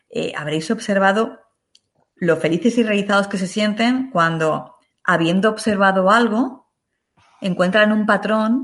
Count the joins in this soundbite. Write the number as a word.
zero